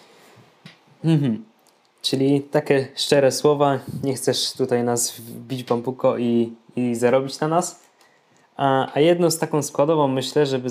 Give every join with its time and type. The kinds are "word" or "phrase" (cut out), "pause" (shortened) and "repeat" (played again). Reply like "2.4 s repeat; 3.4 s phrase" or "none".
none